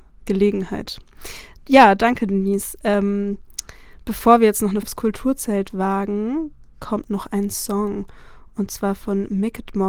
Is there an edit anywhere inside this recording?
yes; 1 cut; at 4.8 s

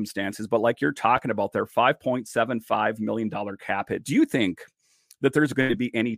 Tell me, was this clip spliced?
no; 0 cuts

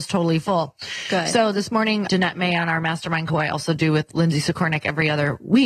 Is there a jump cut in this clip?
yes; 2 cuts; at 2.1 s, 3.3 s

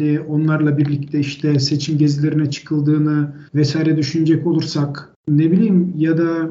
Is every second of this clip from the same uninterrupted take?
no; 1 cut; at 3.5 s

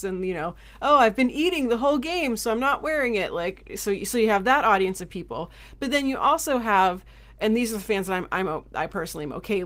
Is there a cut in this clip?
no; 0 cuts

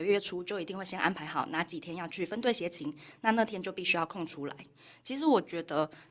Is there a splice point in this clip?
no; 0 cuts

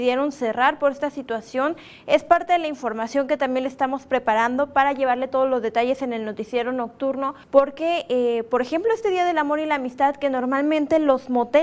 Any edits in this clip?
yes; 1 cut; at 7.4 s

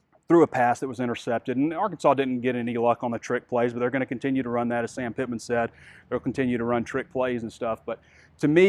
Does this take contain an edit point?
no; 0 cuts

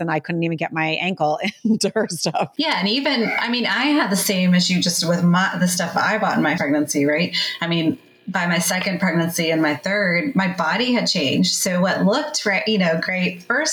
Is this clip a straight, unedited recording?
no; 1 cut; at 6.6 s

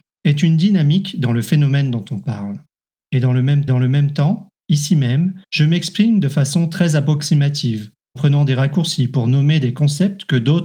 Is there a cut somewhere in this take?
yes; 4 cuts; at 2.8 s, 3.7 s, 5.4 s, 8.2 s

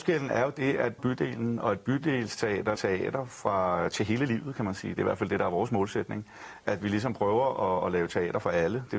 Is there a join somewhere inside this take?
yes; 2 cuts; at 1.0 s, 2.8 s

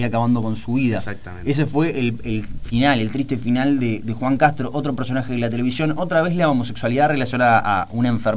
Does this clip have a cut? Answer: no; 0 cuts

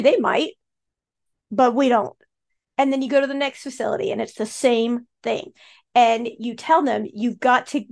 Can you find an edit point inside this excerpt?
no; 0 cuts

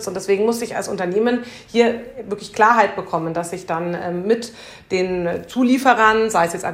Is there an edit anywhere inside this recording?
no; 0 cuts

